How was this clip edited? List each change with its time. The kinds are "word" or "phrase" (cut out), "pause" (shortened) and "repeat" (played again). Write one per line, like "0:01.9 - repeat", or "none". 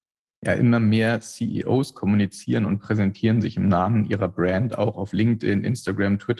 none